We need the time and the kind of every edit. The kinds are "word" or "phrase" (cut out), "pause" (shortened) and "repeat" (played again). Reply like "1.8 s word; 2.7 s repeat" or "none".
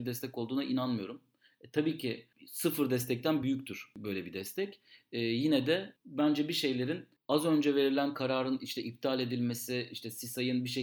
none